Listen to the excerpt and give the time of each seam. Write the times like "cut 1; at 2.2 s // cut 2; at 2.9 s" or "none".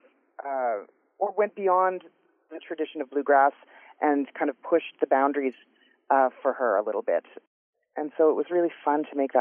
none